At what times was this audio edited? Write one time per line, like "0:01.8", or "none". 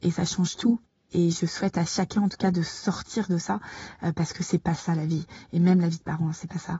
none